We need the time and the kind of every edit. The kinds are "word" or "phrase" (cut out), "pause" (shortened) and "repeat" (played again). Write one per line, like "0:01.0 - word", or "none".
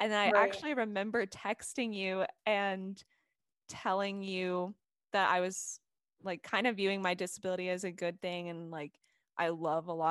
none